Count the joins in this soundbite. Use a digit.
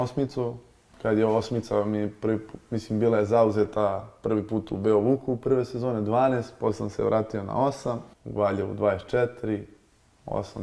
1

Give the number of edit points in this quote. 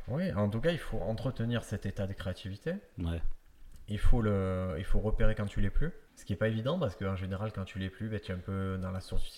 1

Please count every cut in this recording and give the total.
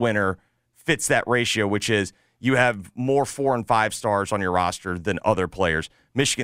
0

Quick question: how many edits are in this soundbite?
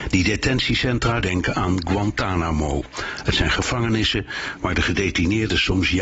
1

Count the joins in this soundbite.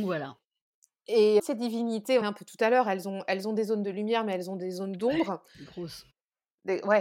2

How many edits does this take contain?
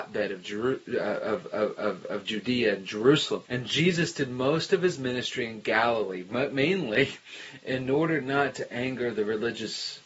1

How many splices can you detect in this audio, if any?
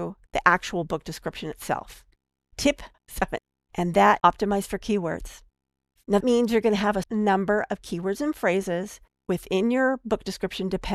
4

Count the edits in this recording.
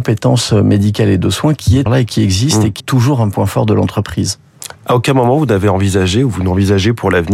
2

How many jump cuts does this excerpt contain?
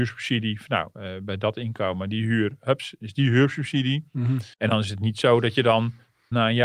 1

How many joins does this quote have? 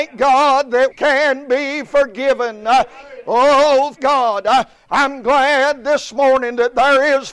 2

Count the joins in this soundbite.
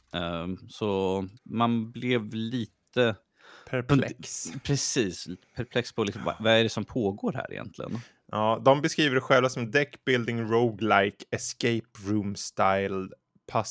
1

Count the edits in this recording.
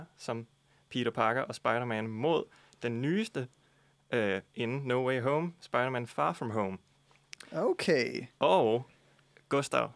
0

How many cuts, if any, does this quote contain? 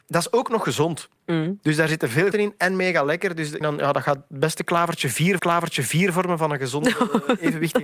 4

